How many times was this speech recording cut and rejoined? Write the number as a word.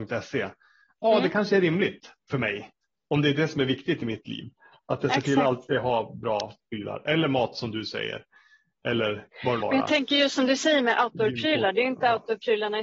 one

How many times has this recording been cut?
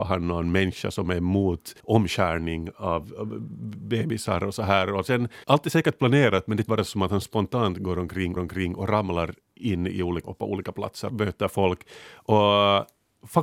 six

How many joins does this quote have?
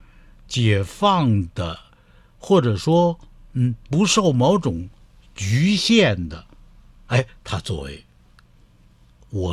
zero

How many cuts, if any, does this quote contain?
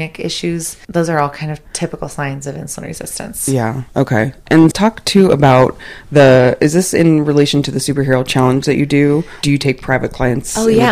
two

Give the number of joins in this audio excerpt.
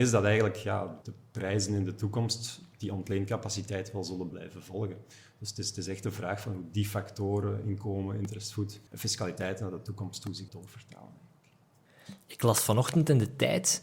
four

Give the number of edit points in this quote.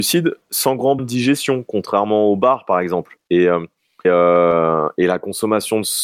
two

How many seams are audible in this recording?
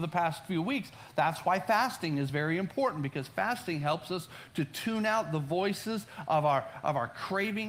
zero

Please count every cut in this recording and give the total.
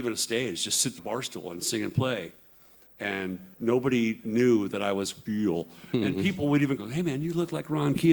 four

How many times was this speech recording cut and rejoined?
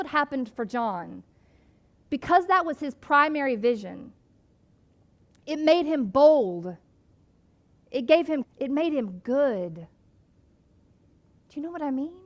one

